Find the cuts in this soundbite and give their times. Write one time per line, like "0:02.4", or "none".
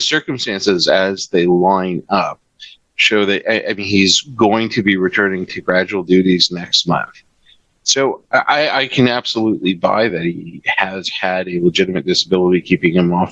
none